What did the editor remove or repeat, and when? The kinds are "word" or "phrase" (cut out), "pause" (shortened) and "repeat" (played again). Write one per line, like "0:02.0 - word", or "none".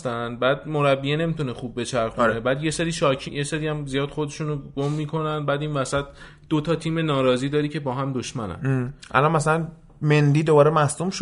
0:03.3 - word